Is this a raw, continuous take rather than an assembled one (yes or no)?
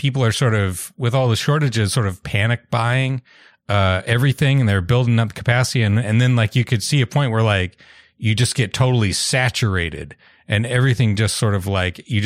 yes